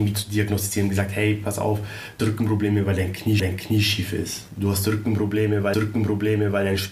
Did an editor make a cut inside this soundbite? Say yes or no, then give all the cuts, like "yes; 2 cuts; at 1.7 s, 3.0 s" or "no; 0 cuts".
yes; 3 cuts; at 2.2 s, 3.4 s, 5.7 s